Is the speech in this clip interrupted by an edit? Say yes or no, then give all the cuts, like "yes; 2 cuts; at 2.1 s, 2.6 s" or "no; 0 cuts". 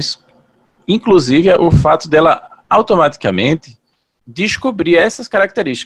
yes; 1 cut; at 2.6 s